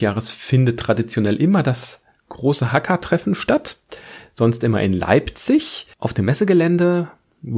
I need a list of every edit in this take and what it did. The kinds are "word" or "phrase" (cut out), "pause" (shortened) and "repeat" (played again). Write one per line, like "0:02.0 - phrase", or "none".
0:05.9 - pause